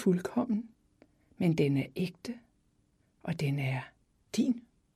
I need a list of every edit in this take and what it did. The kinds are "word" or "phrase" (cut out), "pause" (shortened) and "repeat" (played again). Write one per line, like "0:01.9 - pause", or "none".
none